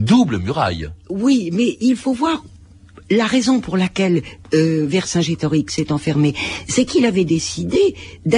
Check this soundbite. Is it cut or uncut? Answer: uncut